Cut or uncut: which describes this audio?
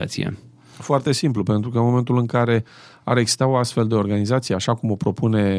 uncut